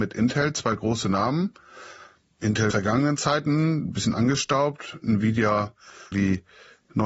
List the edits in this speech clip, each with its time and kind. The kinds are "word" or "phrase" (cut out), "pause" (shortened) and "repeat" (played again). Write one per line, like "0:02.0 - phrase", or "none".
0:02.7 - phrase
0:06.1 - word